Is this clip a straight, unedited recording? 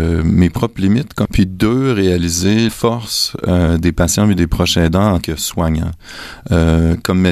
no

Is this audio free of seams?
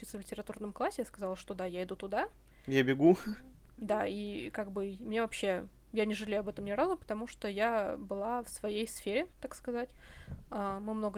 yes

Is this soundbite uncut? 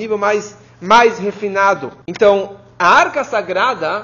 no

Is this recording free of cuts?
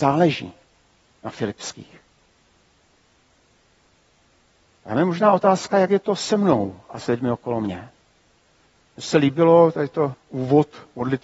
no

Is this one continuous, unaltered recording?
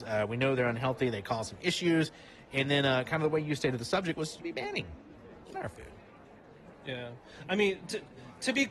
no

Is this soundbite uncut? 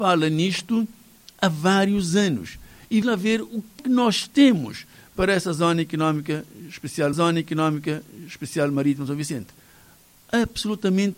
no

